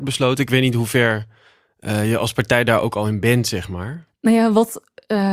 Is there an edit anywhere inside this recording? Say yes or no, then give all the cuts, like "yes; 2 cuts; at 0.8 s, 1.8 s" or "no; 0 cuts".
no; 0 cuts